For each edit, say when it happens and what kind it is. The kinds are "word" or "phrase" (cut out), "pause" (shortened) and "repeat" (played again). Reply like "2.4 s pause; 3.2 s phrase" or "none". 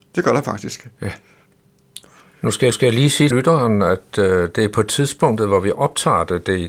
2.7 s repeat; 3.3 s word